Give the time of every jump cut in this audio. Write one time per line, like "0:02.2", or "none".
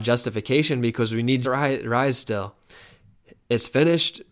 0:01.4